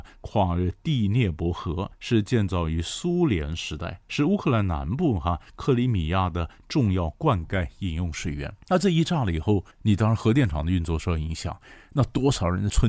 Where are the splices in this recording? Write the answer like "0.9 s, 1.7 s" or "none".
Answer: 1.9 s, 4.0 s, 8.6 s, 9.7 s